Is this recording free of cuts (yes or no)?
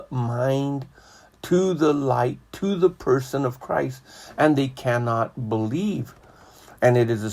yes